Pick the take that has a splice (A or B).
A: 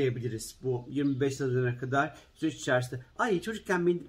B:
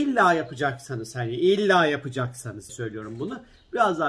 B